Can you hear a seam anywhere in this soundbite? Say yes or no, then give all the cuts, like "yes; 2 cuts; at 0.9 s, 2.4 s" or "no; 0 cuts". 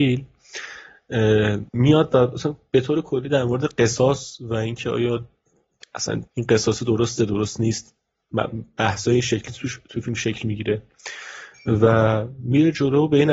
yes; 2 cuts; at 1.7 s, 6.3 s